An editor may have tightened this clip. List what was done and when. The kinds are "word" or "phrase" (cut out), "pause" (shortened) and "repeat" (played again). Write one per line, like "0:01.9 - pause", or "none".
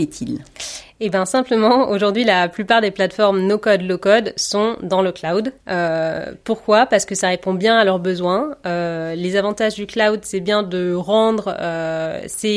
0:05.6 - pause